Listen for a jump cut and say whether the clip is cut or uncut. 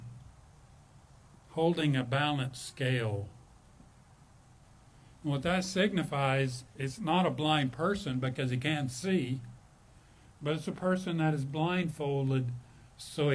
uncut